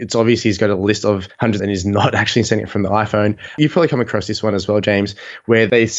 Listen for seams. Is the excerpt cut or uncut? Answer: cut